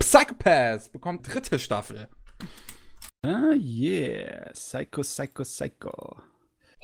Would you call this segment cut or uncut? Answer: cut